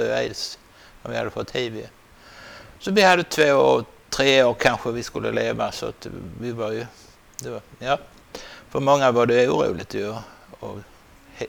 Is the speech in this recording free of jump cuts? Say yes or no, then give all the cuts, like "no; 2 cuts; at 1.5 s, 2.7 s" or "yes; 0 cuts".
yes; 0 cuts